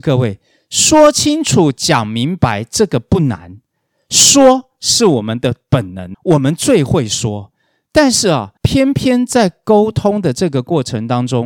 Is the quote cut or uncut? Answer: cut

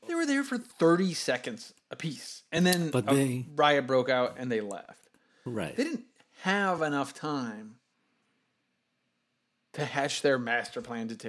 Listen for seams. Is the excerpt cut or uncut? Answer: uncut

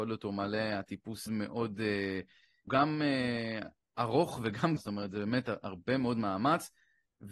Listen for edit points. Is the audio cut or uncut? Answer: cut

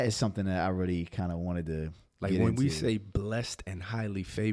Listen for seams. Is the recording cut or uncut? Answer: uncut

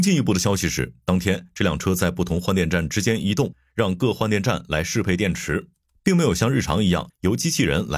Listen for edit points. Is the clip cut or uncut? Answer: uncut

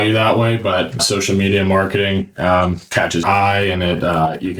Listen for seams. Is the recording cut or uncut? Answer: cut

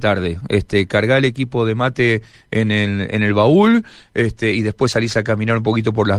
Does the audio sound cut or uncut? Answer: uncut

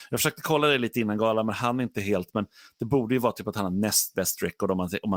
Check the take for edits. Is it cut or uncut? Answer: uncut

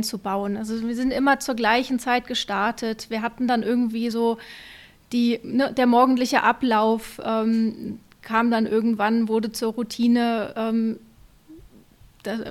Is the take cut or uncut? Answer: uncut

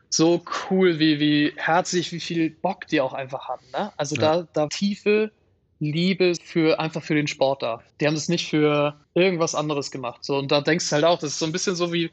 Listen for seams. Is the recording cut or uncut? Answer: cut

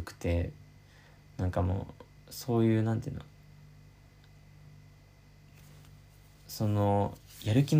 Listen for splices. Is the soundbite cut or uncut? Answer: uncut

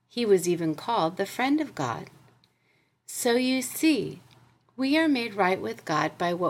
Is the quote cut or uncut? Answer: uncut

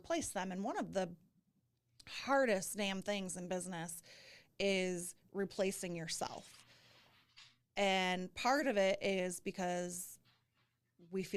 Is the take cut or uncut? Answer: uncut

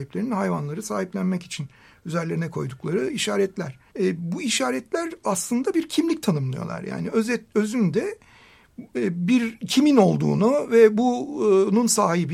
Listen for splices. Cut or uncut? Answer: cut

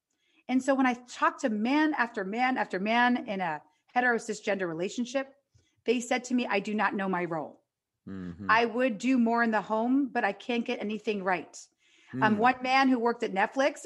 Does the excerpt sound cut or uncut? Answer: uncut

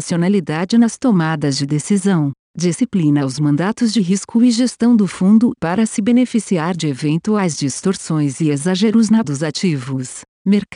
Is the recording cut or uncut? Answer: cut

